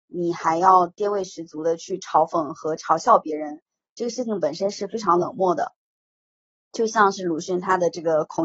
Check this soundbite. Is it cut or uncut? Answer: uncut